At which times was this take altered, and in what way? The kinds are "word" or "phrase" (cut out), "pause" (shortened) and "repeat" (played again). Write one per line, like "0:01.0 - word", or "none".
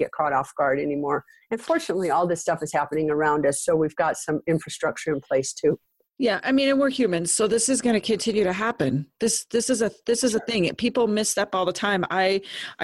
none